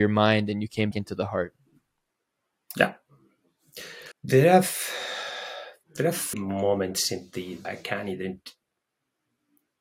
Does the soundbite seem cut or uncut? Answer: cut